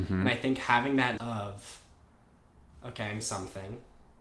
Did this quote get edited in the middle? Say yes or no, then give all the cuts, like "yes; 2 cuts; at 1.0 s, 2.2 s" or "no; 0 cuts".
yes; 2 cuts; at 1.2 s, 3.2 s